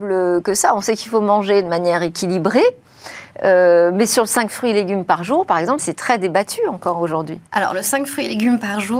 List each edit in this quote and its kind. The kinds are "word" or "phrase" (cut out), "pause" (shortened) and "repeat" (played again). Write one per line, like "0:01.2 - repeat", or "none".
0:05.8 - word
0:07.5 - pause